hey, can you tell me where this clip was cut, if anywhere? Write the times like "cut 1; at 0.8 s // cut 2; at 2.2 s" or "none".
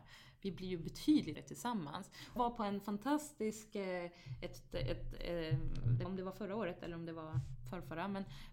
cut 1; at 1.3 s // cut 2; at 2.4 s // cut 3; at 6.0 s